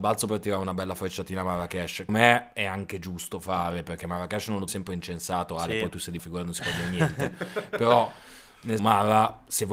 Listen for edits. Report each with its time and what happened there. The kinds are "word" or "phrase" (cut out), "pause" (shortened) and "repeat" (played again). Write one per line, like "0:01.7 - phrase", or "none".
0:02.1 - word
0:04.7 - phrase
0:06.2 - word
0:08.8 - word